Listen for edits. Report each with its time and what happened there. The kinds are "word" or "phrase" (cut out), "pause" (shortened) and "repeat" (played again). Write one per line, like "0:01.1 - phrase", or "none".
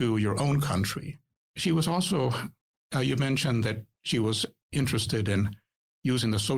none